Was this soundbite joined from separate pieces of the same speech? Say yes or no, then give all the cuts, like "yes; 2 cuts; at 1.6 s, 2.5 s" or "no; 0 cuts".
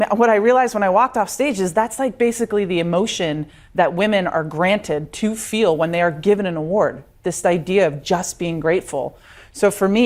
no; 0 cuts